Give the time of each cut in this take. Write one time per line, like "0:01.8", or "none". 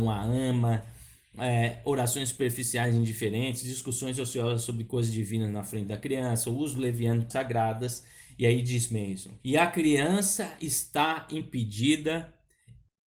0:07.3
0:09.4